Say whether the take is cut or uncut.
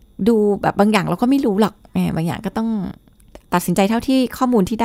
cut